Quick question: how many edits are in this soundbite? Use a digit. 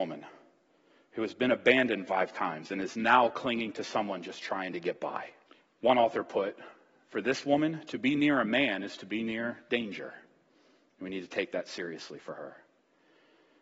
1